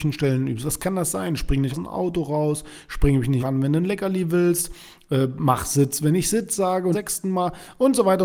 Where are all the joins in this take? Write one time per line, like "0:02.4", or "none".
0:01.7
0:03.4
0:06.9